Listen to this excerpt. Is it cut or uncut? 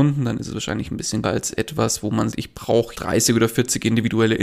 cut